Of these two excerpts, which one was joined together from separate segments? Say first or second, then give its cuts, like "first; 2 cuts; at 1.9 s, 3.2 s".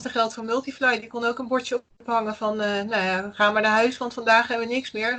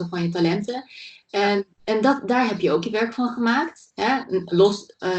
second; 1 cut; at 1.7 s